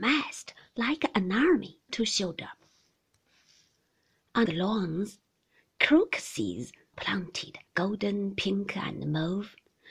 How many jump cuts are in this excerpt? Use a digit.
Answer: 4